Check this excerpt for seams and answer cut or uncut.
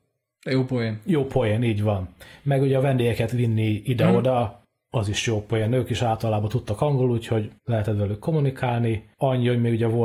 cut